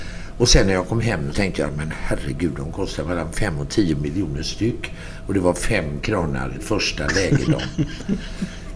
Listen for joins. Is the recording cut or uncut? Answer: cut